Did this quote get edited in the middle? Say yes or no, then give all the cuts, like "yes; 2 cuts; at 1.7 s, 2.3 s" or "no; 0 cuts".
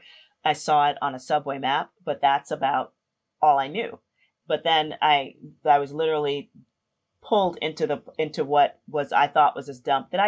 no; 0 cuts